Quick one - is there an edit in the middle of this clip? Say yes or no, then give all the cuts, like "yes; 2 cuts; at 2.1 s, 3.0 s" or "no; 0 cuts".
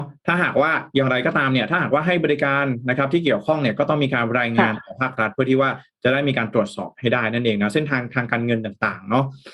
no; 0 cuts